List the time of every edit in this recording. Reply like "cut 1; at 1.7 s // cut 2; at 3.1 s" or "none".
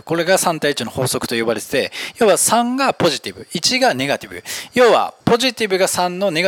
cut 1; at 5.2 s